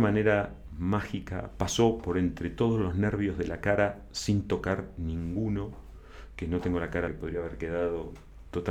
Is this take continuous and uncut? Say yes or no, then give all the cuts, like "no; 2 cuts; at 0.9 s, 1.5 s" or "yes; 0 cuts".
no; 1 cut; at 7.1 s